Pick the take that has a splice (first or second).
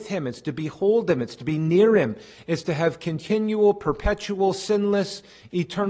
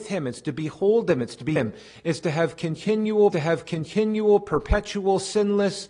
second